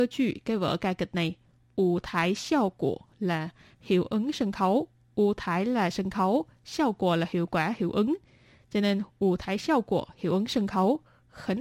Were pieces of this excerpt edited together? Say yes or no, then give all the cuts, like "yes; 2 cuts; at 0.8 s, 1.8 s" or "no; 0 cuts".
no; 0 cuts